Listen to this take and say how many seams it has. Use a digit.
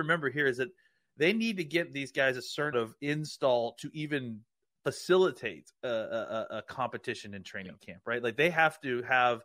1